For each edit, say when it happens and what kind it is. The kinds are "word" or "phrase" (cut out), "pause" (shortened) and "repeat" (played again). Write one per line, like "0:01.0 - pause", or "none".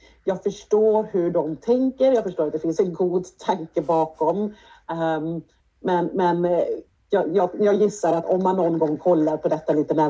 0:05.6 - pause
0:06.9 - pause